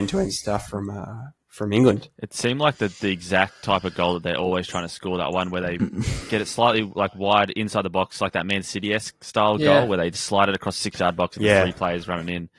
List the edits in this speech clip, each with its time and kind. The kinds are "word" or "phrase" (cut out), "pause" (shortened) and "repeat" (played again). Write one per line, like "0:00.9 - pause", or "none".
none